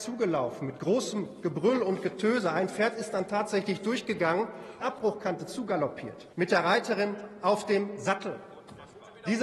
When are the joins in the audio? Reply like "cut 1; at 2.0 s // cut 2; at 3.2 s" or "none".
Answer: cut 1; at 4.8 s // cut 2; at 6.3 s